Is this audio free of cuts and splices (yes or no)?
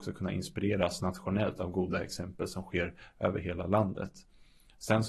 yes